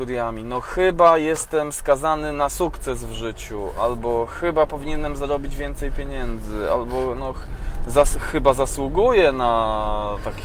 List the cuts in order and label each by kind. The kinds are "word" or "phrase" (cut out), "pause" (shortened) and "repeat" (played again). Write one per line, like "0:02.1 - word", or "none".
none